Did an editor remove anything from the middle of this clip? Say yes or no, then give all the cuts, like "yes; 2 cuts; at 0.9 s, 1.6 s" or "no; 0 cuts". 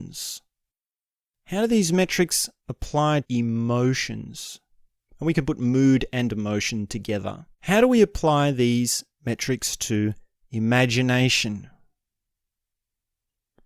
yes; 2 cuts; at 3.2 s, 7.5 s